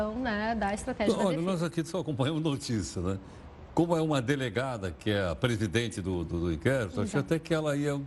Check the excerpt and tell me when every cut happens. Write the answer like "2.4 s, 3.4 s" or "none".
none